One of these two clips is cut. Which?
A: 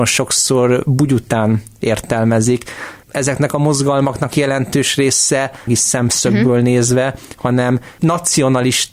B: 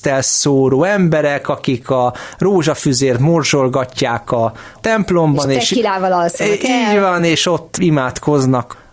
A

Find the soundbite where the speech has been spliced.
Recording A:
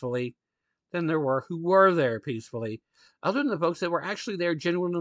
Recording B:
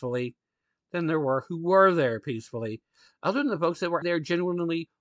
B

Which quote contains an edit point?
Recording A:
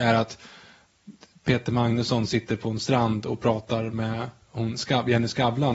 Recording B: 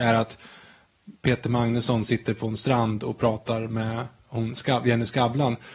B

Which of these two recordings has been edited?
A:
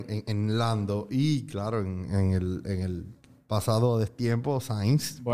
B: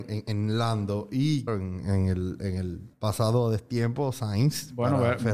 B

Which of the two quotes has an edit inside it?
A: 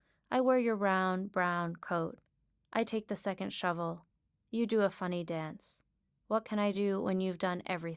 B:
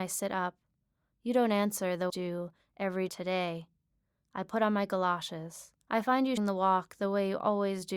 B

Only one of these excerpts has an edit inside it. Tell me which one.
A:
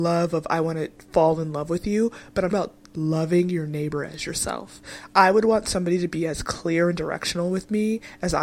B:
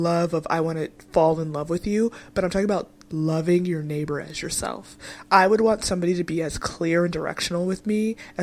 A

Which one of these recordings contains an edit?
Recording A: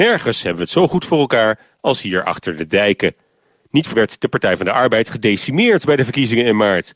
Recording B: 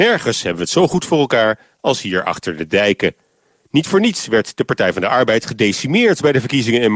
A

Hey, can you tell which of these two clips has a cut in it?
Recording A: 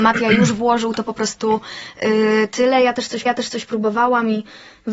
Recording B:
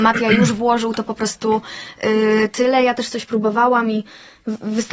A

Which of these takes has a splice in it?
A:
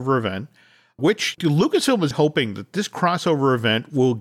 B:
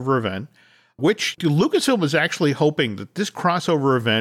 A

